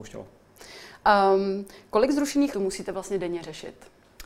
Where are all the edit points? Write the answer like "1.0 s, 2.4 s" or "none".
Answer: 2.5 s